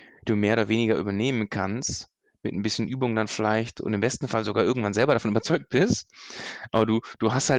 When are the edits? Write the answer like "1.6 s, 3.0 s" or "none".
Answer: 3.8 s